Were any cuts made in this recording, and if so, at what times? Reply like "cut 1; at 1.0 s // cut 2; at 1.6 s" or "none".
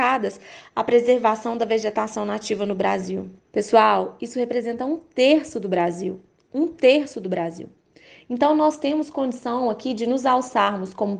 none